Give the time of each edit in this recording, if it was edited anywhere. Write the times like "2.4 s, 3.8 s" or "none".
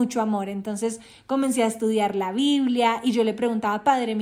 none